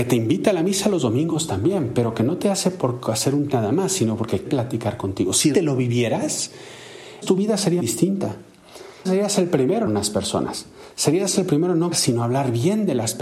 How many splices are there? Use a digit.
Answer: 8